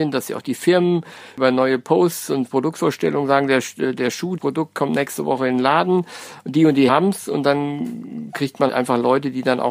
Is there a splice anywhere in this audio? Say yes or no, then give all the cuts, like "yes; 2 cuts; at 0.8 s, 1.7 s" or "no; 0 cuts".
yes; 3 cuts; at 4.4 s, 6.9 s, 8.7 s